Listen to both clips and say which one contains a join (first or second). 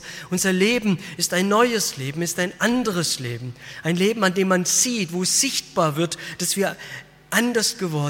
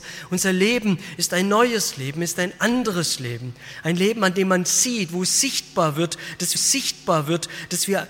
second